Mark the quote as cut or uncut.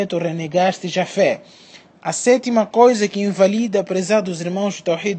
uncut